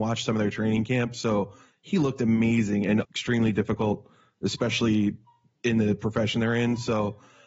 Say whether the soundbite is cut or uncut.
cut